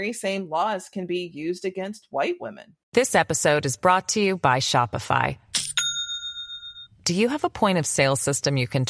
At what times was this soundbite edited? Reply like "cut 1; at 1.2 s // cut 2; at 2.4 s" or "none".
cut 1; at 2.8 s